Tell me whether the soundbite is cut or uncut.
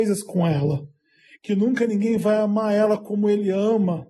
uncut